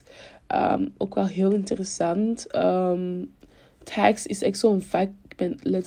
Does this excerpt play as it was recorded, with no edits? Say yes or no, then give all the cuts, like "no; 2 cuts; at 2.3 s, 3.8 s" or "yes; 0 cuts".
yes; 0 cuts